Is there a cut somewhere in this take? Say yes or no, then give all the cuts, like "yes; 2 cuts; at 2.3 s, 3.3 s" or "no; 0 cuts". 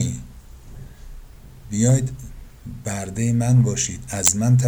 no; 0 cuts